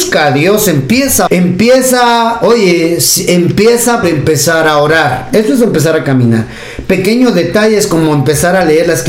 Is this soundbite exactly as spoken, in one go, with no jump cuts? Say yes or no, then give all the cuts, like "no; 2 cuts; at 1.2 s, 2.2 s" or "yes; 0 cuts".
no; 2 cuts; at 1.3 s, 4.0 s